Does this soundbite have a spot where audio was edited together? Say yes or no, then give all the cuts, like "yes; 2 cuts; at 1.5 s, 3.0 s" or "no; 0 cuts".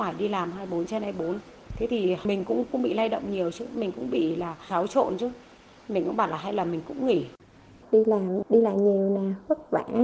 no; 0 cuts